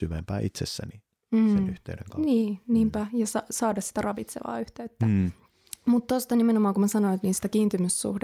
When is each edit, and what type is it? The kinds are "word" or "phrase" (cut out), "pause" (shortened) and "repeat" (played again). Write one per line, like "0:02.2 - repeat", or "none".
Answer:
none